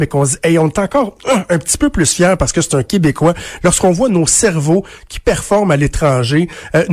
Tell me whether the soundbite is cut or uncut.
uncut